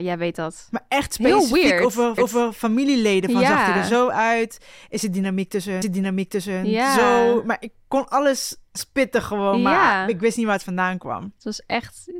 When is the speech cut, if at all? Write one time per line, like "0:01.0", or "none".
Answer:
0:02.2
0:05.8